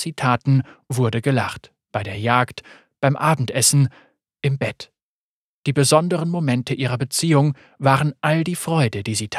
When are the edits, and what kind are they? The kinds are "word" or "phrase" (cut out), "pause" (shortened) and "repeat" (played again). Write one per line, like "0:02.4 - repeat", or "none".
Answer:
none